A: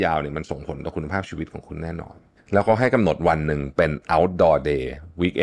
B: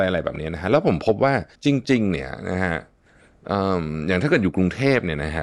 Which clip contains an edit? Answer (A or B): B